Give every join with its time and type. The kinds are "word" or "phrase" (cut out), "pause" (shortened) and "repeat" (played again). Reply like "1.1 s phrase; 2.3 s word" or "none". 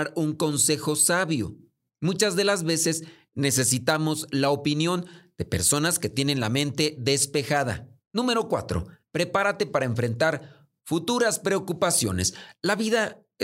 none